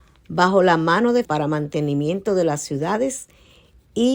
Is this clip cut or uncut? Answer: cut